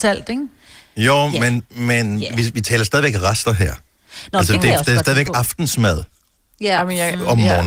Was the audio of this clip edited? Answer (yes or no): no